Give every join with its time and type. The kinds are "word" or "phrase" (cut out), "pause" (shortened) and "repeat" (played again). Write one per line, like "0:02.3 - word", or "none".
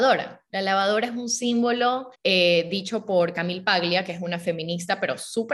0:02.1 - pause